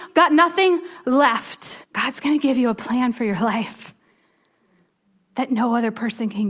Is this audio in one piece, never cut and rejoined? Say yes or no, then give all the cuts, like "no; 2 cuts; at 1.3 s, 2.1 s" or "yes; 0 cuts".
no; 1 cut; at 1.8 s